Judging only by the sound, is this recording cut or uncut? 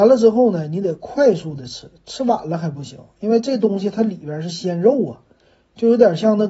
uncut